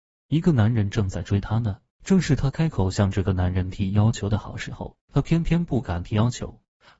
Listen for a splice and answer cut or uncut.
cut